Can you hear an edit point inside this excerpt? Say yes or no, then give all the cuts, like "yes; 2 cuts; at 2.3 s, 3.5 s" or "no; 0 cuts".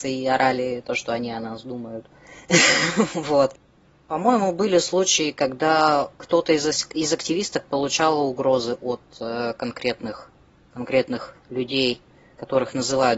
no; 0 cuts